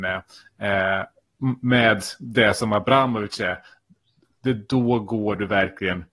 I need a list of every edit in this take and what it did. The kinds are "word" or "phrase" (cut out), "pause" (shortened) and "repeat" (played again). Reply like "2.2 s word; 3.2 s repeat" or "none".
none